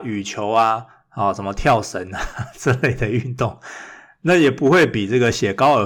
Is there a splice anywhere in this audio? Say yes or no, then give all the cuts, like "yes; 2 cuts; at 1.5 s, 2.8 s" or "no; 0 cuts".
no; 0 cuts